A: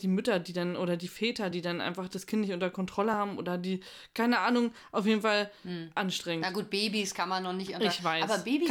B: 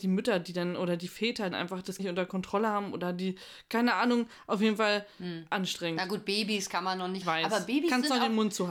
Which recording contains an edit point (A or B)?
B